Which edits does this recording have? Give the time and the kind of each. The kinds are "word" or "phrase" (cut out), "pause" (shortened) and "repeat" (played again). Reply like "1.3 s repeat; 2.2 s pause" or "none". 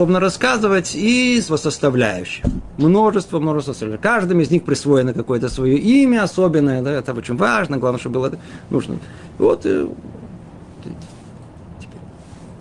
1.5 s word